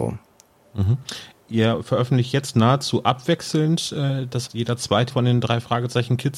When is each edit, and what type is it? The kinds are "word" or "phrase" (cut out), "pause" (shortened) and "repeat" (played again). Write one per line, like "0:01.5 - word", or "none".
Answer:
0:04.5 - word
0:05.1 - word

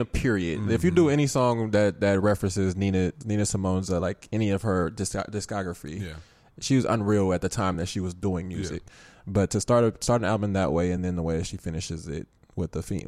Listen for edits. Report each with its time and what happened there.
none

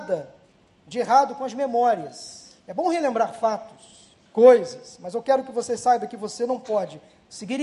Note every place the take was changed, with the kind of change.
0:02.6 - pause
0:04.3 - pause

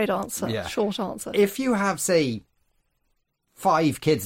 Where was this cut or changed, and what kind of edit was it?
none

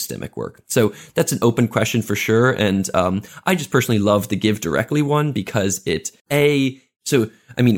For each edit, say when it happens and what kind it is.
0:06.2 - pause

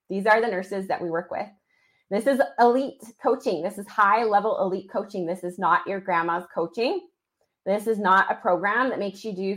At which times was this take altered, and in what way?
none

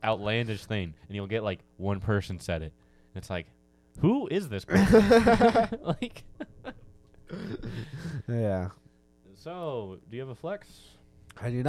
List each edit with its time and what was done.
0:01.0 - pause

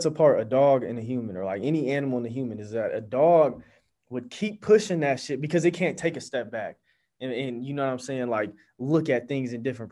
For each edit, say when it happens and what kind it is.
none

